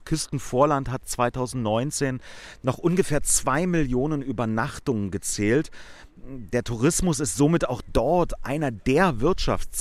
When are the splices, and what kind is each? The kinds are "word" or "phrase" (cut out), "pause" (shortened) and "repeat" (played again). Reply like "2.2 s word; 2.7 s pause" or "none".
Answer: none